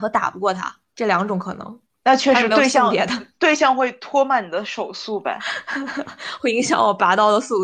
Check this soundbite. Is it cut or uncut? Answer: uncut